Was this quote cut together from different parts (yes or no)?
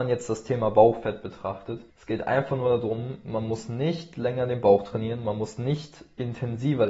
yes